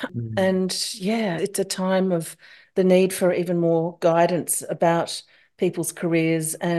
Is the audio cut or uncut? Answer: cut